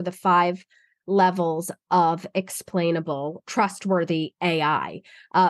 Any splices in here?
yes; 1 cut; at 3.4 s

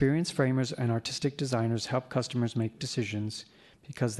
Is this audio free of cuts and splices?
no; 1 cut; at 2.8 s

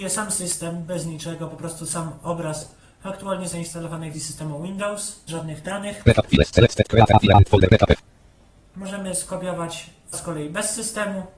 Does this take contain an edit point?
yes; 3 cuts; at 4.1 s, 5.3 s, 10.1 s

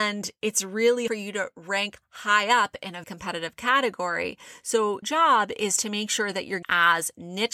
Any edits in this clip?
yes; 4 cuts; at 1.1 s, 3.0 s, 5.0 s, 6.6 s

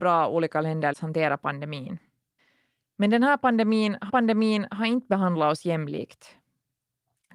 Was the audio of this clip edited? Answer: yes; 3 cuts; at 0.9 s, 2.4 s, 4.1 s

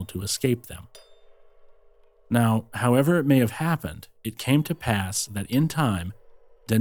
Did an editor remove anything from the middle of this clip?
no; 0 cuts

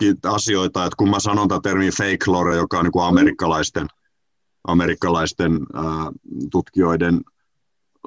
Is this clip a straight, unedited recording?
yes; 0 cuts

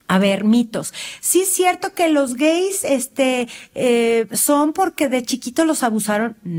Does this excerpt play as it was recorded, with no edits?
yes; 0 cuts

